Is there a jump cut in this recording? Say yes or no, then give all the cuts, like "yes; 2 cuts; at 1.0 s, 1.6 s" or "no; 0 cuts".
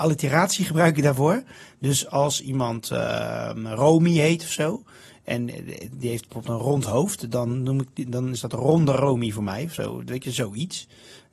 no; 0 cuts